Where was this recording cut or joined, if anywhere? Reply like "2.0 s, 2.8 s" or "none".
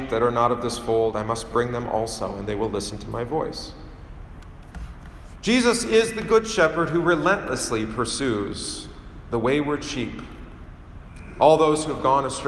none